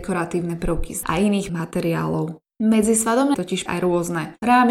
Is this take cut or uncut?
cut